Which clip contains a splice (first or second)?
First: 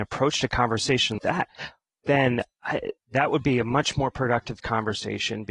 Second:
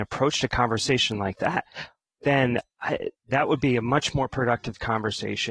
first